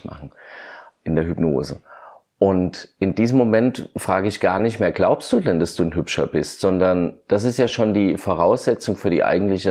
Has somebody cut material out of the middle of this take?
no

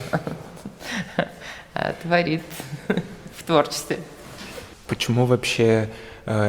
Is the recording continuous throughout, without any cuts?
yes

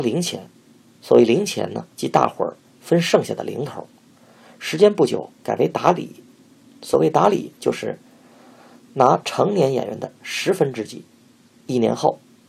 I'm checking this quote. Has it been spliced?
yes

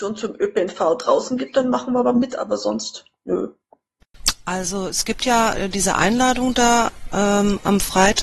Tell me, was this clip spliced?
no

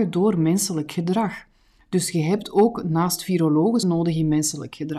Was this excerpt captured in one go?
no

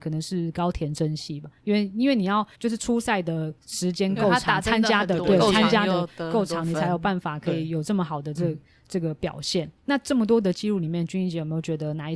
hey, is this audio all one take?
no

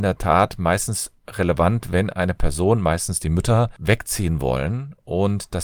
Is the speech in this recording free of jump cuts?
yes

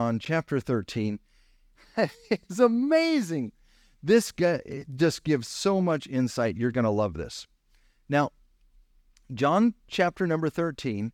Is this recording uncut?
yes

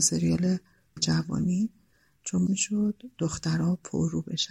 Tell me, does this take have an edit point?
yes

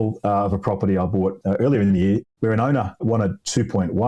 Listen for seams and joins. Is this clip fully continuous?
yes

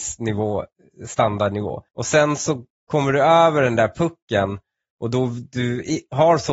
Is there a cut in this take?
yes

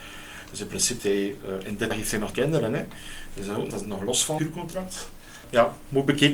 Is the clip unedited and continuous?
no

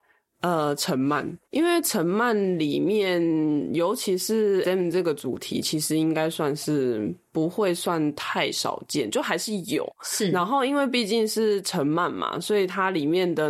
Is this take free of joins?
no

